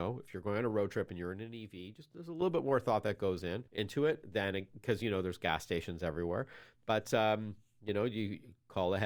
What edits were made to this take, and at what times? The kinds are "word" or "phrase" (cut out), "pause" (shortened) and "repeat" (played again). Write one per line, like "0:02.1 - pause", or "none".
0:03.7 - pause